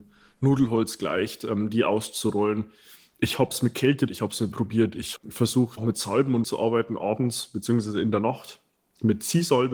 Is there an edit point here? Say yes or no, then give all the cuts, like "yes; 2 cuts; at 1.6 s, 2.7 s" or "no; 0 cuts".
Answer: yes; 5 cuts; at 4.1 s, 4.5 s, 5.2 s, 5.8 s, 6.4 s